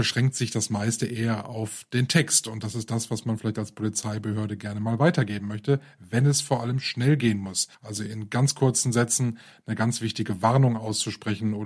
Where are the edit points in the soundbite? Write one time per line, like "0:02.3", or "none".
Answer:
0:07.7